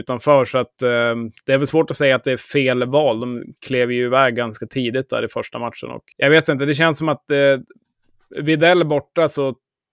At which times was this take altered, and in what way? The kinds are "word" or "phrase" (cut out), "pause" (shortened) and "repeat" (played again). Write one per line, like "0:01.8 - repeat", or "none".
0:03.6 - pause
0:06.1 - pause